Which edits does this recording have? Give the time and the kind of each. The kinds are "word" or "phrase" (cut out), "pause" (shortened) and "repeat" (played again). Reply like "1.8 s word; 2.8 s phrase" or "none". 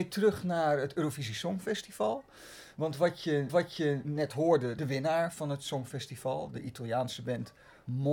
3.5 s repeat; 4.8 s phrase